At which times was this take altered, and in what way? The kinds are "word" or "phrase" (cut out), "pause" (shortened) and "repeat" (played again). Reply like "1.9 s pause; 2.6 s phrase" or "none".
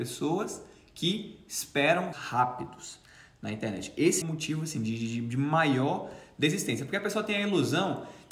2.1 s word; 4.2 s word

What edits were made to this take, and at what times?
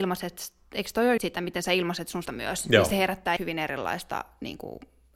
1.2 s word; 2.3 s word; 3.4 s word

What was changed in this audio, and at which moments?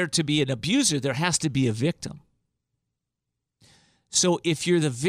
none

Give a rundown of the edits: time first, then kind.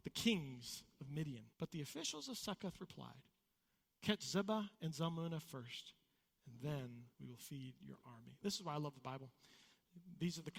1.5 s pause; 4.7 s pause; 7.1 s pause

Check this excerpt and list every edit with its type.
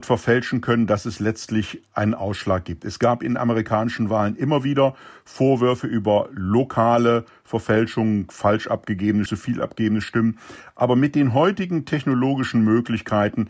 9.3 s word

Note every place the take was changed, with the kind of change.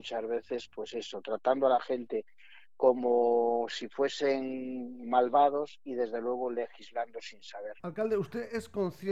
7.8 s pause

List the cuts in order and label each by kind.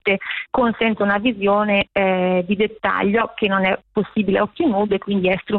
none

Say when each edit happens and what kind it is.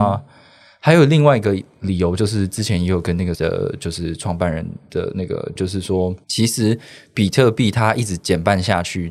3.3 s phrase; 5.6 s phrase; 6.2 s pause

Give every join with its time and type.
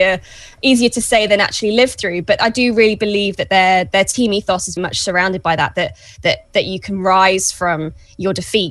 4.8 s word

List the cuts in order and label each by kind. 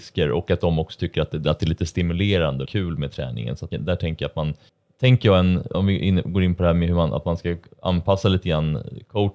2.7 s phrase; 3.7 s word; 4.7 s pause; 5.7 s phrase

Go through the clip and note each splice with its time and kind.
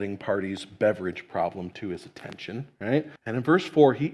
3.2 s pause

